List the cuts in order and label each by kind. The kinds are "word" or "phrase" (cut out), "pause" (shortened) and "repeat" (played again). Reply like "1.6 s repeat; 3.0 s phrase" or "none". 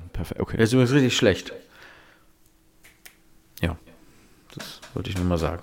none